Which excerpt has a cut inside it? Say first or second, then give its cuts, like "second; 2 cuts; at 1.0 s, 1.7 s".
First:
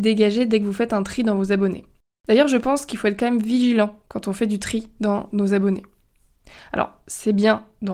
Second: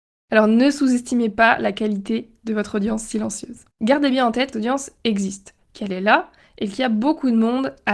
second; 2 cuts; at 3.7 s, 4.5 s